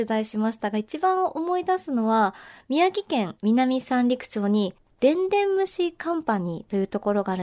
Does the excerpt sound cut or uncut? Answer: uncut